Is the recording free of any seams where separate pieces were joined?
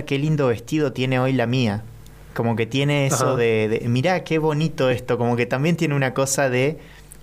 yes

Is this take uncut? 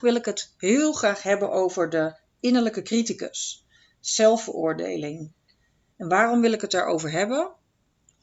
yes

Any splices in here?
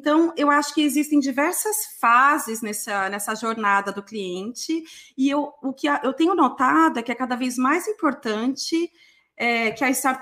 no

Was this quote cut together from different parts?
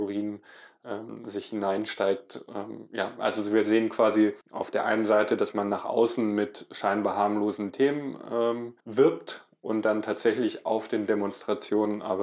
yes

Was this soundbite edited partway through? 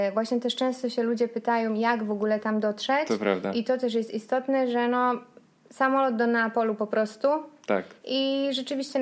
no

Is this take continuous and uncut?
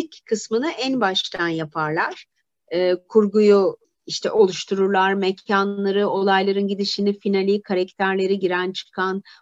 no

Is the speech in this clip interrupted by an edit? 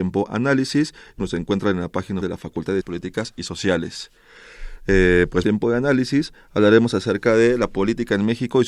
yes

